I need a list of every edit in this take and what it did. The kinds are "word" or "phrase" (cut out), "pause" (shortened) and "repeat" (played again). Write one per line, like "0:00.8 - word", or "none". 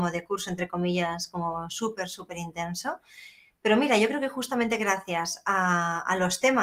none